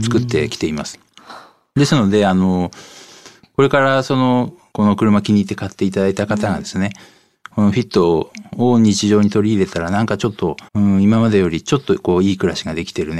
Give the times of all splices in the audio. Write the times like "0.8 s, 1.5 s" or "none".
10.7 s